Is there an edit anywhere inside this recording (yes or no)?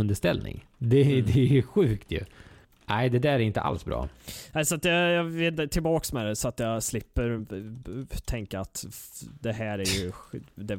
no